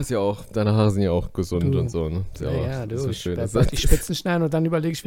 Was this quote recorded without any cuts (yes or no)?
yes